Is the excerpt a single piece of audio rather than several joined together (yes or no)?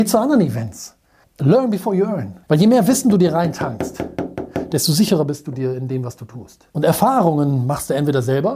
no